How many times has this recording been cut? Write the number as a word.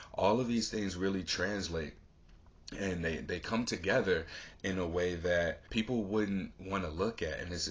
one